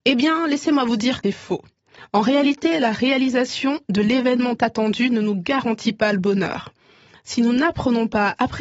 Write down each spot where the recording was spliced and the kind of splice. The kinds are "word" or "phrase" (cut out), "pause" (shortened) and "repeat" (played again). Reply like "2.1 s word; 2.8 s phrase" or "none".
1.2 s word; 4.6 s word